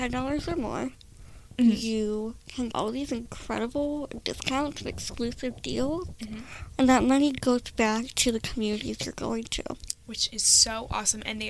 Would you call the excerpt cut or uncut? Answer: cut